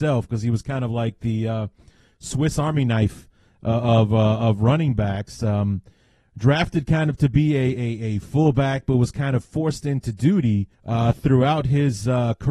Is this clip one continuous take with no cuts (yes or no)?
no